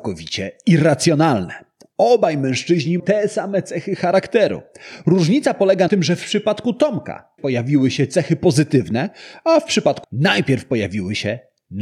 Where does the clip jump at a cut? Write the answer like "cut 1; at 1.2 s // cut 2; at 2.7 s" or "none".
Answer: cut 1; at 3.0 s // cut 2; at 5.9 s // cut 3; at 7.4 s // cut 4; at 10.0 s